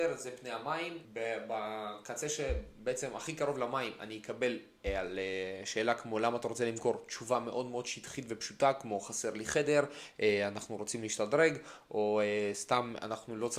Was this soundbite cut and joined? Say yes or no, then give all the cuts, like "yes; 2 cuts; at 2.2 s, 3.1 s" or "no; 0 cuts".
yes; 1 cut; at 1.0 s